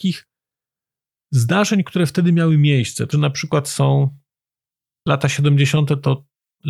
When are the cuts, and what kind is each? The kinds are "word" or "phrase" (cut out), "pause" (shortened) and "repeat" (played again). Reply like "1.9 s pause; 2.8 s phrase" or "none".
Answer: 3.1 s word